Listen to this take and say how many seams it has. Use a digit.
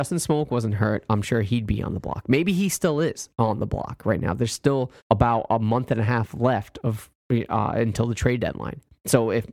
1